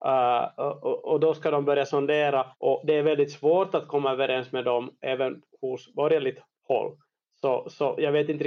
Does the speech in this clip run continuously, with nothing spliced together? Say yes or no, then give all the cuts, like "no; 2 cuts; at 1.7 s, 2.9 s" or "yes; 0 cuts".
no; 2 cuts; at 2.5 s, 6.6 s